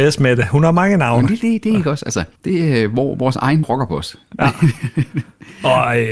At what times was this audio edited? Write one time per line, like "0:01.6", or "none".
0:01.4
0:02.4
0:03.6